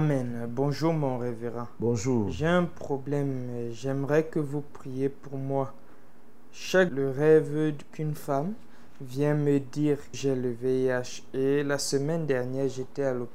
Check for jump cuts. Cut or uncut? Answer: cut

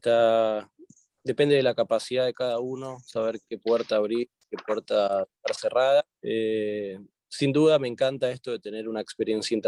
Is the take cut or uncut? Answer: cut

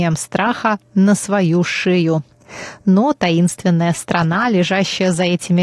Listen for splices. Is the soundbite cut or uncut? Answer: uncut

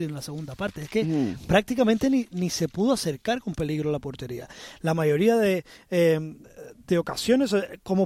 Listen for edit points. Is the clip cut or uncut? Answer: uncut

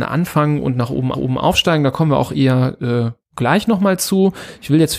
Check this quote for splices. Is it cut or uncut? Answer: cut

